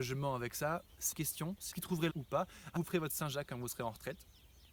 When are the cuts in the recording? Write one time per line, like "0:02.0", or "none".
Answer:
0:01.1
0:01.7
0:02.1
0:02.8